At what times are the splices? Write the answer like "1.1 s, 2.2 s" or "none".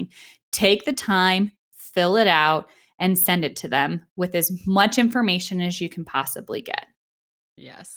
none